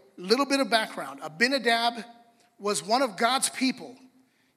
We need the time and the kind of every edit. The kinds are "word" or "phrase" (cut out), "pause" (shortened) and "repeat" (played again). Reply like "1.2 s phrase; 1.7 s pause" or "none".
none